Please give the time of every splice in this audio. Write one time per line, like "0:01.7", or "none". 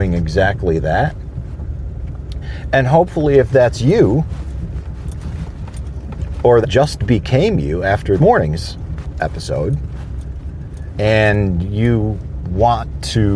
0:06.6
0:08.2